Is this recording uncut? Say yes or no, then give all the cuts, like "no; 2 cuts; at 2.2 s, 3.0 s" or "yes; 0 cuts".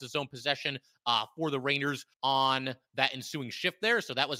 no; 1 cut; at 2.1 s